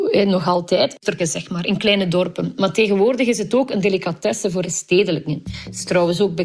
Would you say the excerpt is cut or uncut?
cut